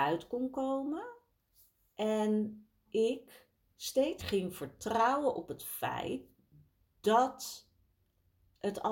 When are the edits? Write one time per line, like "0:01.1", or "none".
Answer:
0:02.9
0:04.2